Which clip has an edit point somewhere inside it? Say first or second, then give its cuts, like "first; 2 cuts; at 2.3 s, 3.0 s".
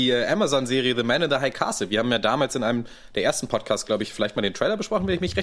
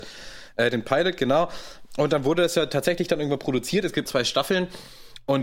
second; 1 cut; at 4.1 s